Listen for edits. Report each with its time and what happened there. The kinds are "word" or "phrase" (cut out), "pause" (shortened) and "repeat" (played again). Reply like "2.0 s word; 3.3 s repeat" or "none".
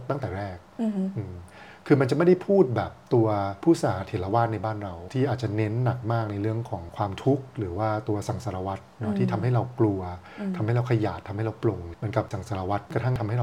12.3 s word